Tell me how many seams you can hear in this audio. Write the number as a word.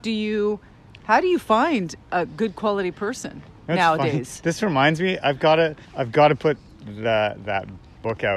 one